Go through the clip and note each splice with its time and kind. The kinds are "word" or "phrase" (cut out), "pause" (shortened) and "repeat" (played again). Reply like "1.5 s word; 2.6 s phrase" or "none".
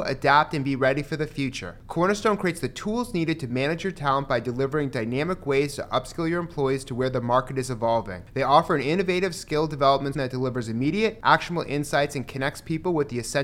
10.1 s word